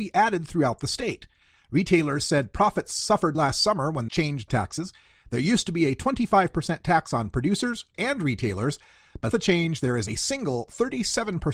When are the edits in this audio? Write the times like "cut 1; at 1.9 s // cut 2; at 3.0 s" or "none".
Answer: cut 1; at 3.3 s // cut 2; at 4.1 s // cut 3; at 4.5 s // cut 4; at 7.9 s // cut 5; at 9.3 s // cut 6; at 10.1 s